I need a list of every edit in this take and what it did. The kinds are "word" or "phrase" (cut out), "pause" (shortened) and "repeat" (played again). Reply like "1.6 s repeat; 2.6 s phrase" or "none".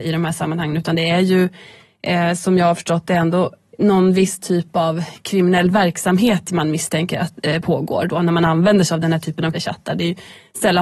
9.5 s word